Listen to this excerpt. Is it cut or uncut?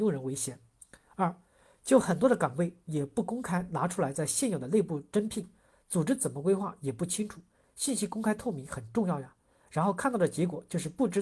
uncut